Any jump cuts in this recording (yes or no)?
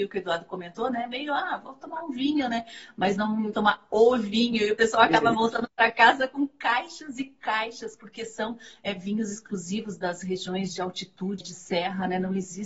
yes